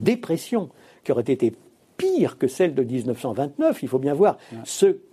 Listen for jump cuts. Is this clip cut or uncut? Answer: uncut